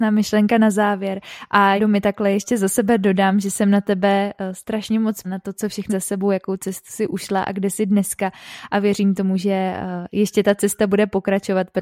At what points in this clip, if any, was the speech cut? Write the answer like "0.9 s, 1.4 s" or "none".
1.8 s, 5.2 s, 5.9 s